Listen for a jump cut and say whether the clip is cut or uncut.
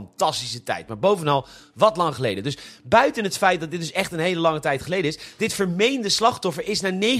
uncut